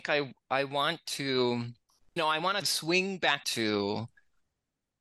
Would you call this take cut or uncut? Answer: cut